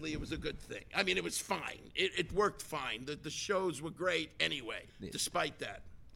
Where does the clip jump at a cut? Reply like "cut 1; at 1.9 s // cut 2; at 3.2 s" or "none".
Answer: cut 1; at 4.9 s